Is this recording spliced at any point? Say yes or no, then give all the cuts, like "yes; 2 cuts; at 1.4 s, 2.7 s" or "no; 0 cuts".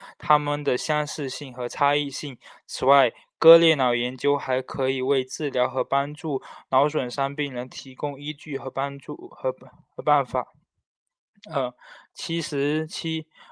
no; 0 cuts